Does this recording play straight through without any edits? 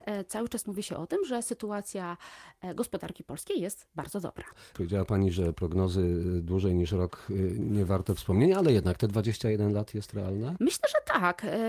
yes; 0 cuts

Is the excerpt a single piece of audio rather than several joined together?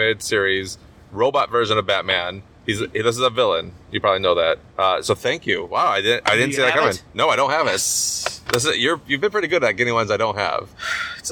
no; 1 cut; at 4.7 s

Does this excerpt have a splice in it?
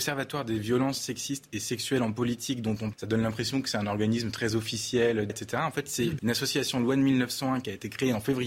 yes; 3 cuts; at 2.9 s, 5.3 s, 6.2 s

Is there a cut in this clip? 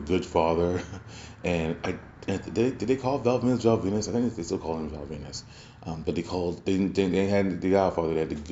no; 0 cuts

